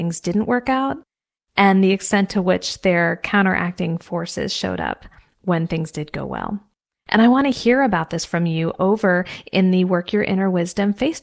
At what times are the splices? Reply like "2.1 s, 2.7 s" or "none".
none